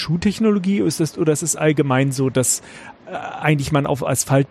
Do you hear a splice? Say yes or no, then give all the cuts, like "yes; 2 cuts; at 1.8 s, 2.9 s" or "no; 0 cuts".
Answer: no; 0 cuts